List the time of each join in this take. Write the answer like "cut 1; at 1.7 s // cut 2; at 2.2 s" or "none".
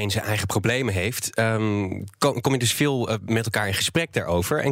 none